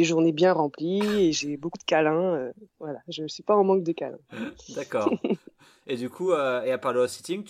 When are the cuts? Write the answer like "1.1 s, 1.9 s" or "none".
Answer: none